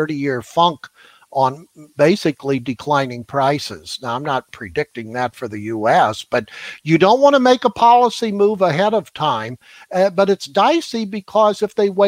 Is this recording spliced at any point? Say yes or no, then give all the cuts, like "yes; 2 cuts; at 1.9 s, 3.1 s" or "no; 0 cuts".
no; 0 cuts